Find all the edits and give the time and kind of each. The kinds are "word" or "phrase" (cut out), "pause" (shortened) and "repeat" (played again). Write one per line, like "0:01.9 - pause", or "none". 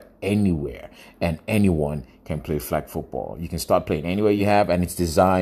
none